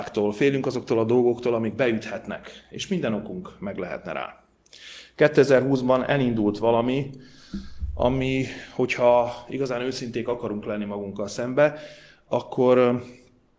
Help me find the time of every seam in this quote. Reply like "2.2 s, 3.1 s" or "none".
none